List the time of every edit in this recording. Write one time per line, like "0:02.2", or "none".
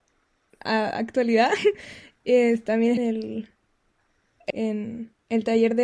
0:03.0
0:04.5